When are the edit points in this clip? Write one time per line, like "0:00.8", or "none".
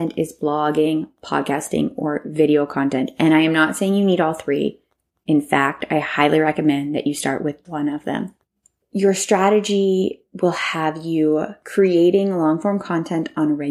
0:07.6